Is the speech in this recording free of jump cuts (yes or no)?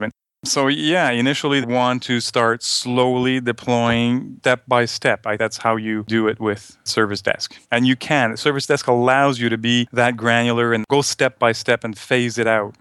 no